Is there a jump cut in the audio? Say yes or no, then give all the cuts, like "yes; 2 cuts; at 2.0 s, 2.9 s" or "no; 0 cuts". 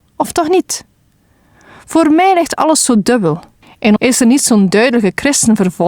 yes; 1 cut; at 4.0 s